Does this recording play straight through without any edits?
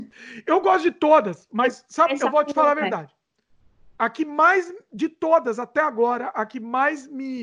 yes; 0 cuts

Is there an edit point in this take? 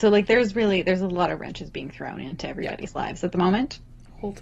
no; 0 cuts

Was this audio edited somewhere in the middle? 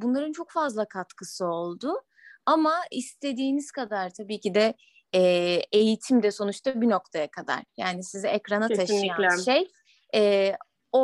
no; 0 cuts

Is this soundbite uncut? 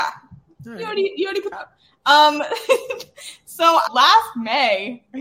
no; 2 cuts; at 1.5 s, 3.9 s

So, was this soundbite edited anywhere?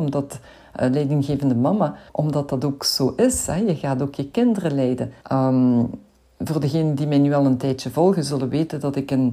yes; 2 cuts; at 2.1 s, 5.2 s

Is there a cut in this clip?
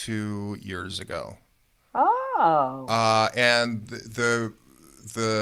no; 0 cuts

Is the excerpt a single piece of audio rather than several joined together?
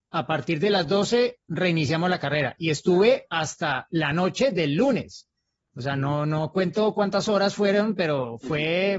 yes; 0 cuts

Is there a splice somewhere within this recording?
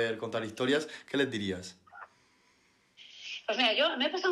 no; 0 cuts

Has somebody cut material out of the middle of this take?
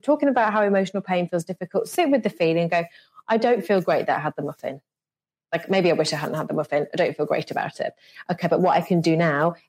no; 0 cuts

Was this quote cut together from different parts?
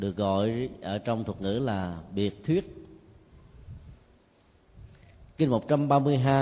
no; 0 cuts

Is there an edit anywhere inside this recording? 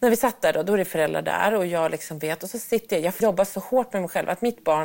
yes; 1 cut; at 3.2 s

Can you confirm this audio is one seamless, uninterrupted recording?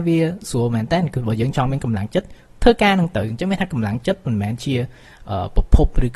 yes; 0 cuts

